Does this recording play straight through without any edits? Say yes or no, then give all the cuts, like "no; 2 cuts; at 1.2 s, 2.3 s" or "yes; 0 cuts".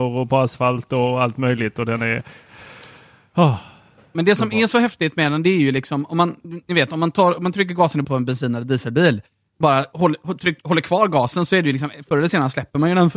no; 1 cut; at 8.0 s